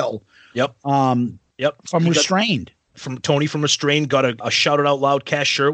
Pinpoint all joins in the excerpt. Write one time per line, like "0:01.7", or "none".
0:02.9
0:04.4